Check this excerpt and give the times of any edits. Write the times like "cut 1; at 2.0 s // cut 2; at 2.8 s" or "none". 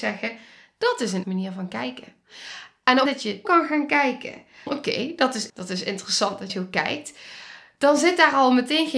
cut 1; at 1.2 s // cut 2; at 3.1 s // cut 3; at 3.4 s // cut 4; at 4.7 s // cut 5; at 5.5 s // cut 6; at 6.5 s